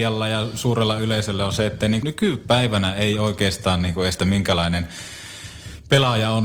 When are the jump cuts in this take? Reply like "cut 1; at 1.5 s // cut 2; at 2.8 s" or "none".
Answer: cut 1; at 2.0 s // cut 2; at 4.2 s